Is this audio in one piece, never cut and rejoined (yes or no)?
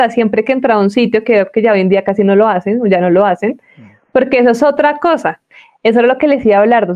yes